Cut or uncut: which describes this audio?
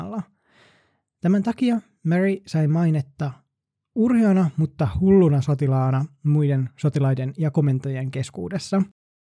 uncut